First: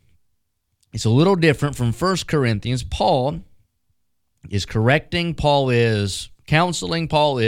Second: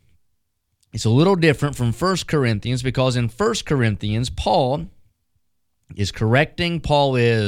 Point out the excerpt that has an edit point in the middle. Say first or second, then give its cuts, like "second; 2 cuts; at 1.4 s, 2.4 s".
first; 1 cut; at 2.8 s